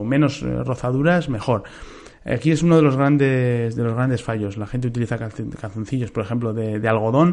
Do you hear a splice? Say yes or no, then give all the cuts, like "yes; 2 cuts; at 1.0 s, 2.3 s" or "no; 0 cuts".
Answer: no; 0 cuts